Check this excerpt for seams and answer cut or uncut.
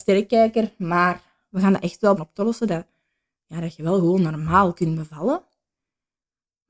cut